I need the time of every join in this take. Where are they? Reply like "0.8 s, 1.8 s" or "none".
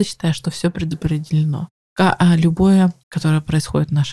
3.0 s